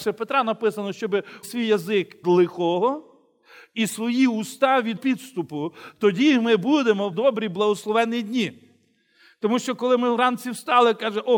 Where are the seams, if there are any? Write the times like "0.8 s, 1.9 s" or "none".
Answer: 1.4 s, 2.2 s, 5.0 s, 7.1 s